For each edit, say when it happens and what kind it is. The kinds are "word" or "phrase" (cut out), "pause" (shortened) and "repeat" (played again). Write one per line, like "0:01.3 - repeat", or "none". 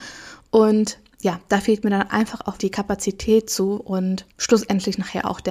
0:02.6 - word
0:04.3 - pause